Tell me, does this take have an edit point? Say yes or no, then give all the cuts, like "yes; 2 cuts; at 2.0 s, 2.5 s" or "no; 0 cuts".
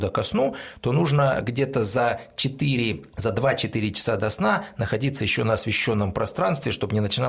no; 0 cuts